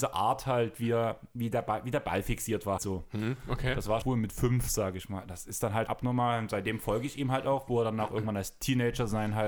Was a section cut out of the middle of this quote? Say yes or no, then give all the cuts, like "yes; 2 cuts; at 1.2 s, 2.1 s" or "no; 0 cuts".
yes; 3 cuts; at 2.8 s, 4.0 s, 5.9 s